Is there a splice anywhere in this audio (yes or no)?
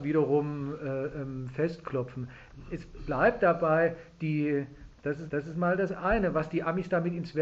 yes